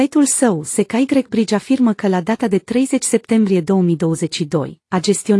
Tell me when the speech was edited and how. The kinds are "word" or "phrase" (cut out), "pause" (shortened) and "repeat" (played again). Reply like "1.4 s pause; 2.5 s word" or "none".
none